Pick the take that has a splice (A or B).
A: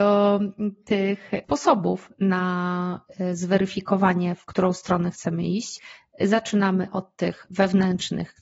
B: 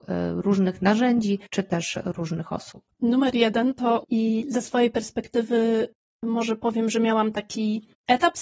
B